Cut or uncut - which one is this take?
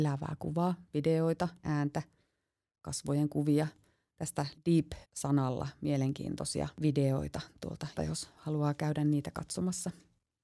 cut